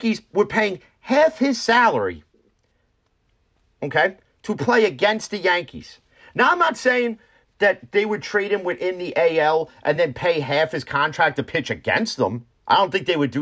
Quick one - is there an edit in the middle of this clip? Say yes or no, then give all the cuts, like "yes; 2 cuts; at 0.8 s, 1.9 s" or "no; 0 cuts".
no; 0 cuts